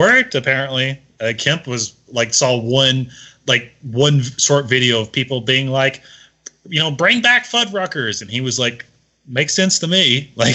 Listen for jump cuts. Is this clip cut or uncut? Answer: uncut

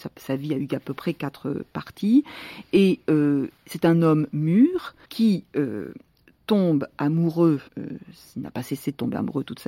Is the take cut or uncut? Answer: cut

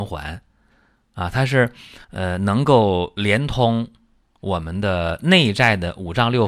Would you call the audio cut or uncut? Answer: cut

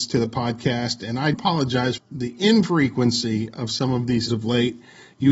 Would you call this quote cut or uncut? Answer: cut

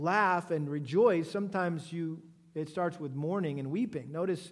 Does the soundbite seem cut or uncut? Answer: uncut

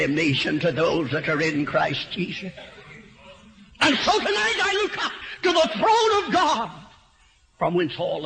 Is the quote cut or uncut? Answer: uncut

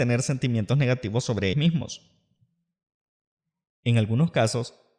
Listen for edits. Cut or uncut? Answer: cut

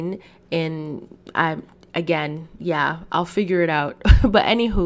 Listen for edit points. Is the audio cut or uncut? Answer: uncut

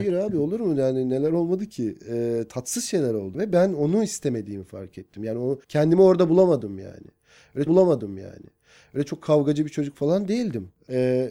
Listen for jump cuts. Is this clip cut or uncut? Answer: cut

